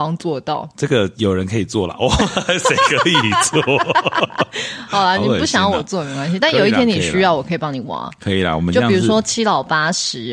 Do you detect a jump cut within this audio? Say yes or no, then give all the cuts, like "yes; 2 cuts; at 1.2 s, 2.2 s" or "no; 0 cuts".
no; 0 cuts